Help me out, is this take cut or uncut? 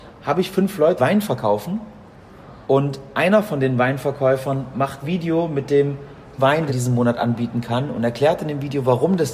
cut